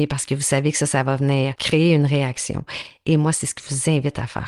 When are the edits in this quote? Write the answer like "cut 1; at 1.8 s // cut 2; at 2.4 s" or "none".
cut 1; at 1.5 s // cut 2; at 3.6 s